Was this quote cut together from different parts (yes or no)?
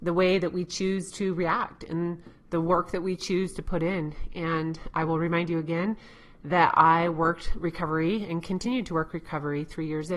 no